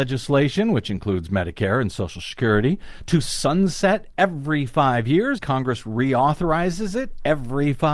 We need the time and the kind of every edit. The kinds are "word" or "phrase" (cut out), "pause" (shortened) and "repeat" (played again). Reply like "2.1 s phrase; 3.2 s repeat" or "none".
5.4 s word